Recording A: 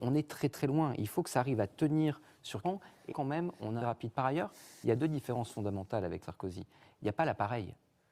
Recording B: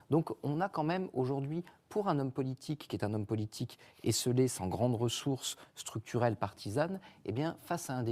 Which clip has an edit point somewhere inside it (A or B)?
A